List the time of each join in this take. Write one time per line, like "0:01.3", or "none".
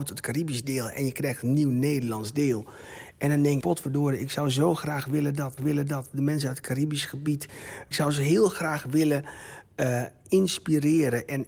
0:03.6
0:05.6